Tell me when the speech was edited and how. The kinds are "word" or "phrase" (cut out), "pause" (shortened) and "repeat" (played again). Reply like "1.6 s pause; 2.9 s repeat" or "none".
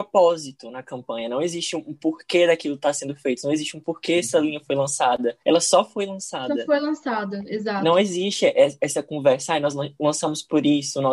5.4 s pause